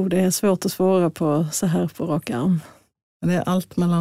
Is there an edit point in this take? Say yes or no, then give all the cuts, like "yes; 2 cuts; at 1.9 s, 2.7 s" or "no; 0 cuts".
no; 0 cuts